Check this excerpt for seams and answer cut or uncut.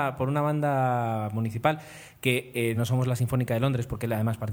cut